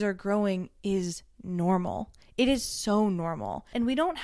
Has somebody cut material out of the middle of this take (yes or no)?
no